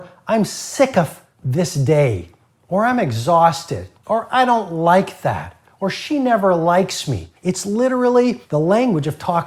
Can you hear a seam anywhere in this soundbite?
yes; 2 cuts; at 4.0 s, 7.4 s

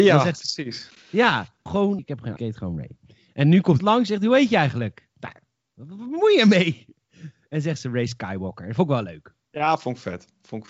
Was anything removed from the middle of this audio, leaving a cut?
yes; 4 cuts; at 1.7 s, 2.0 s, 2.4 s, 3.8 s

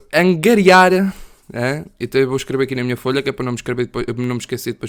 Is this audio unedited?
yes; 0 cuts

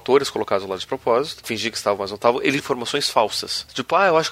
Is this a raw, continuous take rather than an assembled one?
no; 2 cuts; at 1.4 s, 2.6 s

